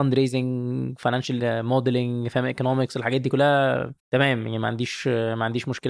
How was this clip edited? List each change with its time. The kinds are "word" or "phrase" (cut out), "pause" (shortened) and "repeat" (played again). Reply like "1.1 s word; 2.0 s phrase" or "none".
1.4 s word; 4.0 s pause